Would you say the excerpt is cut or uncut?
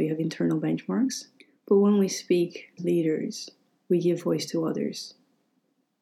cut